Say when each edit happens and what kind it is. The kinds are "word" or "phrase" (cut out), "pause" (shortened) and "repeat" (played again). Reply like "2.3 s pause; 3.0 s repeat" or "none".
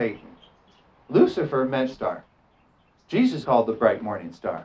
1.9 s word; 3.4 s word